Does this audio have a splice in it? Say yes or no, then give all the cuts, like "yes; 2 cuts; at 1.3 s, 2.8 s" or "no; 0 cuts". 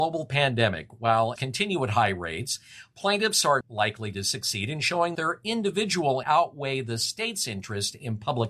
yes; 4 cuts; at 1.4 s, 3.6 s, 5.1 s, 6.2 s